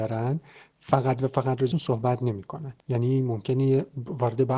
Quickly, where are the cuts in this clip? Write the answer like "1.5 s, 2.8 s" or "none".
1.7 s, 2.8 s